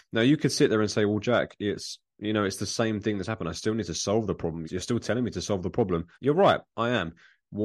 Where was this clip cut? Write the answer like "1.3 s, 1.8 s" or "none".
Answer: 4.6 s, 6.1 s